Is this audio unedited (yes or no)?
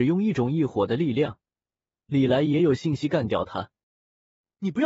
yes